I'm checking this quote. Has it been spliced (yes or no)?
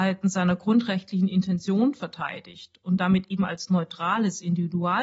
no